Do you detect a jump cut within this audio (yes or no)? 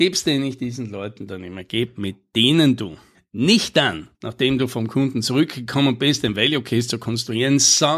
yes